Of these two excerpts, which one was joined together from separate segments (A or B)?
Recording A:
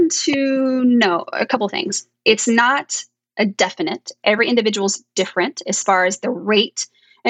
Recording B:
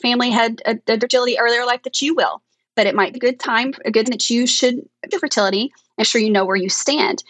B